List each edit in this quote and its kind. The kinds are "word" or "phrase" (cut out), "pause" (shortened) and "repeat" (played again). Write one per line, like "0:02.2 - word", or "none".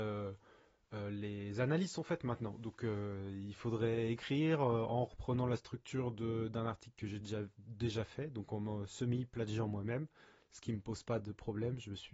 none